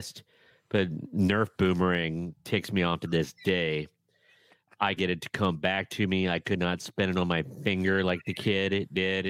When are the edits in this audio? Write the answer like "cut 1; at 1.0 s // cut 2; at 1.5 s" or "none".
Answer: cut 1; at 5.0 s